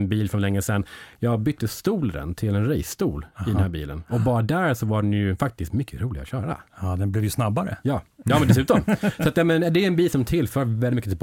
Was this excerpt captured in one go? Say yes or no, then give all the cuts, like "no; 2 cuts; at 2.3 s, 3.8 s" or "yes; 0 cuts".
yes; 0 cuts